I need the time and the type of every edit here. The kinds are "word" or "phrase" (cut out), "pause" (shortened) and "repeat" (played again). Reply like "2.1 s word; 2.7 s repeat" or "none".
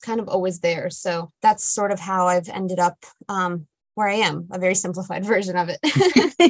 1.3 s pause